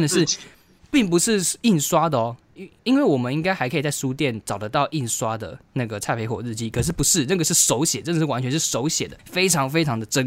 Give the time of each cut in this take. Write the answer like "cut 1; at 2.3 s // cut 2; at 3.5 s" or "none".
cut 1; at 2.8 s